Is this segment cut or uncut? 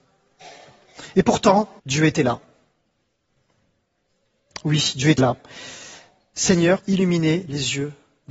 cut